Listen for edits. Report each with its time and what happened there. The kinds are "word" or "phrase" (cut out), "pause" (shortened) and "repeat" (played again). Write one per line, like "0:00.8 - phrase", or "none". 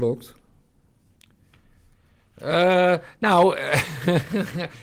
none